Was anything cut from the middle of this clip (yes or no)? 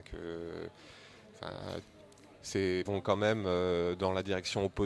yes